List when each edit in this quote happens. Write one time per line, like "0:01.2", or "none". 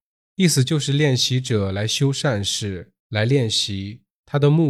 0:03.0